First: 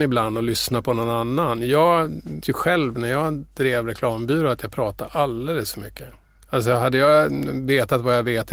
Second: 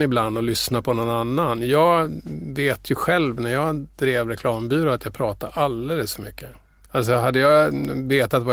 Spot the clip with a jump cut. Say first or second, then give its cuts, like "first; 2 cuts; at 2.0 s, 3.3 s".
first; 1 cut; at 2.4 s